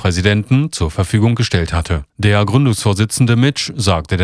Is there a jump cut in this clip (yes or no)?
yes